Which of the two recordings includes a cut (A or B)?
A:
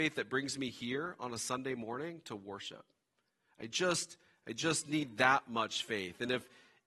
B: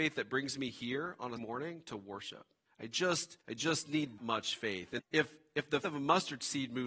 B